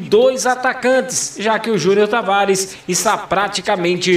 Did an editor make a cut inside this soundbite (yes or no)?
no